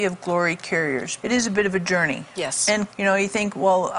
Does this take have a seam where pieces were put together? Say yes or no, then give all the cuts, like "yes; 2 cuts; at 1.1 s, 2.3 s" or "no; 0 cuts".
yes; 2 cuts; at 1.2 s, 2.9 s